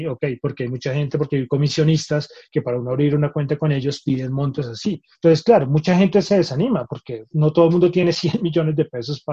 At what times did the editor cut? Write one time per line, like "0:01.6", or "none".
0:05.1